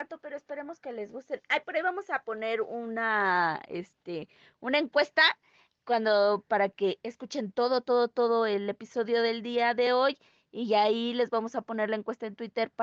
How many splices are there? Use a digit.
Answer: 0